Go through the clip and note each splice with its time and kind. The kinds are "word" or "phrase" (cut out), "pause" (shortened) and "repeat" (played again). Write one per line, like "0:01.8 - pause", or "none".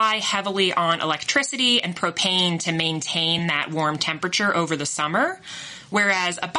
none